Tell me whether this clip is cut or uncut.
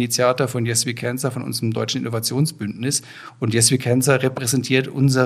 uncut